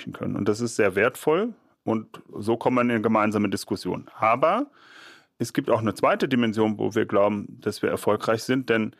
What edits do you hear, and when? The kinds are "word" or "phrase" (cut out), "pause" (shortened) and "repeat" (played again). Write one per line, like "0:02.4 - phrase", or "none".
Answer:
none